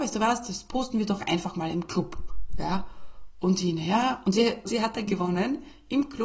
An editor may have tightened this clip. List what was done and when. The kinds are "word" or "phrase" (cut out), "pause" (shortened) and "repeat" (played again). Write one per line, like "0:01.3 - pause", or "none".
0:04.6 - word
0:05.1 - phrase

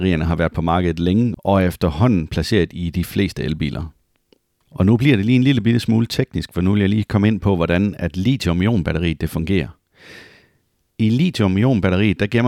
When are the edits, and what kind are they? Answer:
none

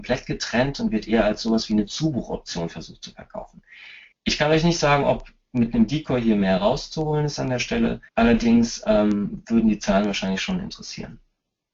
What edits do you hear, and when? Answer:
0:04.1 - pause
0:08.1 - pause

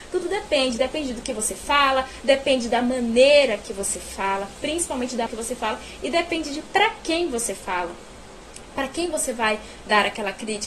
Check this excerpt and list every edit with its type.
0:05.3 - word

